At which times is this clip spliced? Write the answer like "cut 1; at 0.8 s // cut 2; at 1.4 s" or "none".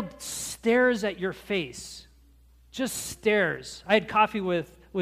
none